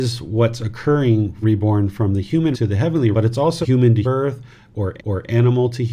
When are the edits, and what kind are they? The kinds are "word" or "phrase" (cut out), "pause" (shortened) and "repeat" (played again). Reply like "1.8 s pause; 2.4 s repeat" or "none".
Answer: 1.4 s word; 2.5 s word; 3.1 s word; 3.6 s phrase; 4.0 s word; 5.0 s repeat